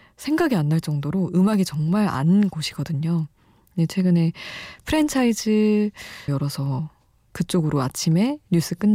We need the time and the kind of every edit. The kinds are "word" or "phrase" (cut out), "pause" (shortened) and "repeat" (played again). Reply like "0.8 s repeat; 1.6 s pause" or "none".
2.5 s word; 6.3 s phrase